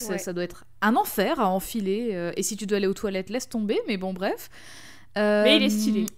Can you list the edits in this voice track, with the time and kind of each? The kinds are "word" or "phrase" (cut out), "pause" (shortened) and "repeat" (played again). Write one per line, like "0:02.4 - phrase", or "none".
none